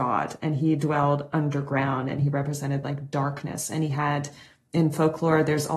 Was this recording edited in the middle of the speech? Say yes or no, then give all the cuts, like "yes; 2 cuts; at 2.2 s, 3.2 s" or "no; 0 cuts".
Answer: no; 0 cuts